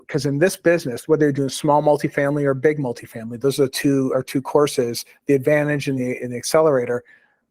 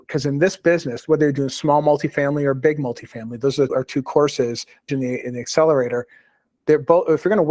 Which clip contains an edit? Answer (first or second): second